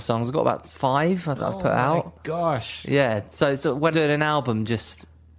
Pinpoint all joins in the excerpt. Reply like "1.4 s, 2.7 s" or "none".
1.4 s, 3.6 s, 3.9 s